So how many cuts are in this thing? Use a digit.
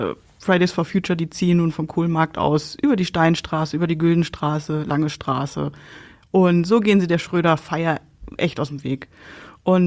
0